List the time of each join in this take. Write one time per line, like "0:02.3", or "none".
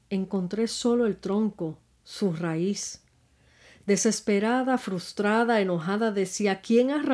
none